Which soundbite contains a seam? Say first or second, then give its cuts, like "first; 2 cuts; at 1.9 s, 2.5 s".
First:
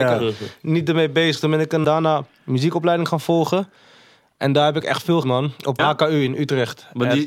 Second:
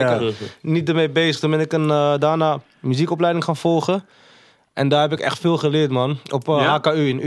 first; 3 cuts; at 1.8 s, 5.2 s, 5.8 s